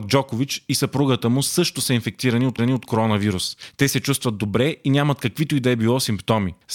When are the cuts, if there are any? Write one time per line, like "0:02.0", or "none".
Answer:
0:02.6